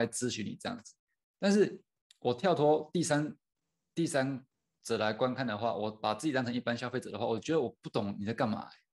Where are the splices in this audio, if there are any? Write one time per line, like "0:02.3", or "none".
none